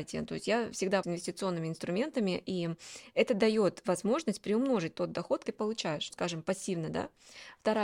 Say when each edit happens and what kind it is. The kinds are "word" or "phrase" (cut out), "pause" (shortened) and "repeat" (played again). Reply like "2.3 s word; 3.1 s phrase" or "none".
1.0 s word; 5.4 s word; 6.1 s word